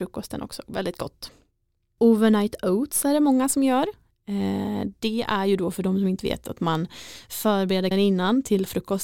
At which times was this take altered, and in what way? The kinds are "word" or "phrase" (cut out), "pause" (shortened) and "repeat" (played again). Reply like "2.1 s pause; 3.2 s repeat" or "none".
7.9 s word

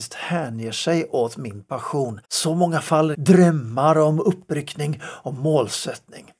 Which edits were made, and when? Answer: 2.2 s pause; 3.1 s phrase

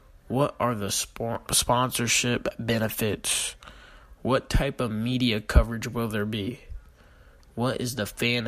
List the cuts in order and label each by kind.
none

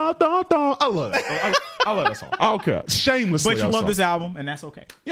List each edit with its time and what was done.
1.5 s word; 3.7 s word

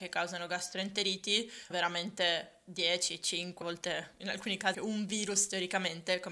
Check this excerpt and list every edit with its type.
1.7 s word; 3.6 s word; 4.7 s word

